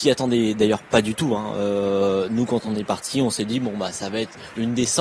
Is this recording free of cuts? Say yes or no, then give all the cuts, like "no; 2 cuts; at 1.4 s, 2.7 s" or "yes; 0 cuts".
yes; 0 cuts